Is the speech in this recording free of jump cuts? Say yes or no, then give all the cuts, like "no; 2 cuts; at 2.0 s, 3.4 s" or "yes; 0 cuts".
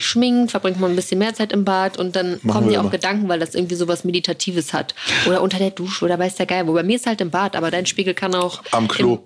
yes; 0 cuts